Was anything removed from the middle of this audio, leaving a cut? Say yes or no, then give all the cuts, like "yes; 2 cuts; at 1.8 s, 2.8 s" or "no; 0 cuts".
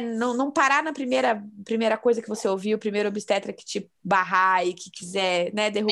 yes; 1 cut; at 4.0 s